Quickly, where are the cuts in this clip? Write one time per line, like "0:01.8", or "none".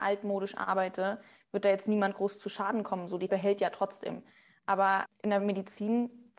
0:03.3
0:05.1